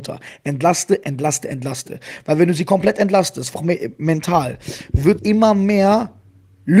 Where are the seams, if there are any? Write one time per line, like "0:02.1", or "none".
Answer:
0:01.0
0:03.6
0:05.2